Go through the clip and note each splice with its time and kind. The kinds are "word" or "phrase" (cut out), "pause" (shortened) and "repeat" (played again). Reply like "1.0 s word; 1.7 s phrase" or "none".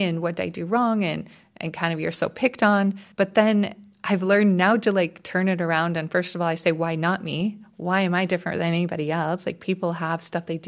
3.1 s pause